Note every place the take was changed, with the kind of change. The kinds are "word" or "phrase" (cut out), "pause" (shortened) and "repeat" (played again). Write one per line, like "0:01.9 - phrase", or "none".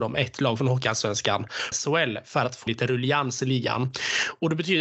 0:01.7 - phrase
0:02.7 - word